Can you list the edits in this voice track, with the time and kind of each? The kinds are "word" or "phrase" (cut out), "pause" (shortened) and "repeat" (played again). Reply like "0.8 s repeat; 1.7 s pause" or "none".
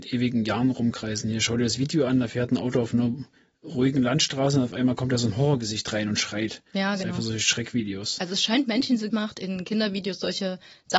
6.7 s pause; 9.1 s phrase